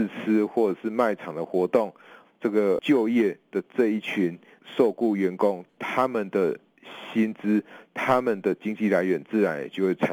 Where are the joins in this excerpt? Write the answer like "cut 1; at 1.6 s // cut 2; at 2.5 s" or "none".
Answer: cut 1; at 5.7 s

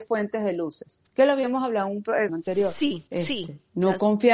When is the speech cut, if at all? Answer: cut 1; at 1.1 s // cut 2; at 2.3 s // cut 3; at 3.1 s

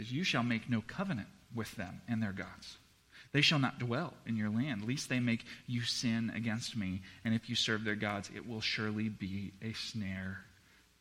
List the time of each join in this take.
none

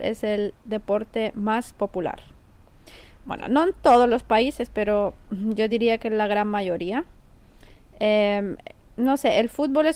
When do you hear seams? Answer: none

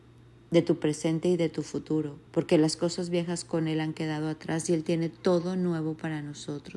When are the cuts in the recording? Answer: cut 1; at 2.3 s

